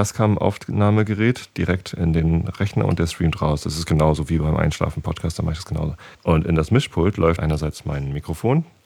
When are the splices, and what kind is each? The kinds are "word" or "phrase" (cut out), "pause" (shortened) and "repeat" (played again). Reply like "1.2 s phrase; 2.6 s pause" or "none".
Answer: 6.1 s pause; 7.4 s word